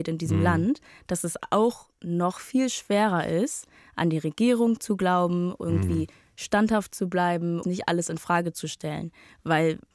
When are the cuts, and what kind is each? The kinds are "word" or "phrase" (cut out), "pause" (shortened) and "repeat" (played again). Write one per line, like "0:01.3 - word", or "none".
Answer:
0:07.6 - phrase